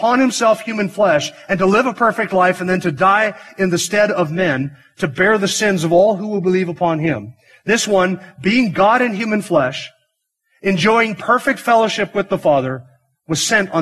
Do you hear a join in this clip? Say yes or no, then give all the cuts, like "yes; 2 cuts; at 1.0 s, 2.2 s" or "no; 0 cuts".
no; 0 cuts